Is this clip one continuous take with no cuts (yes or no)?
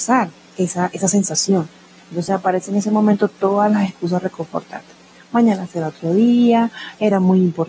yes